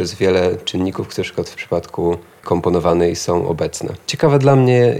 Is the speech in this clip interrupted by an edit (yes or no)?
yes